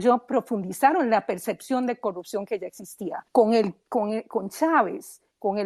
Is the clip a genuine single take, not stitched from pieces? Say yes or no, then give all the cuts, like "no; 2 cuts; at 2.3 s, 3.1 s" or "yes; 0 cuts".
no; 1 cut; at 3.3 s